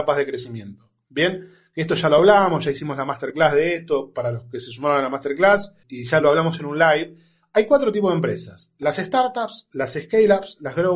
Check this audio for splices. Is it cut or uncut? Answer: uncut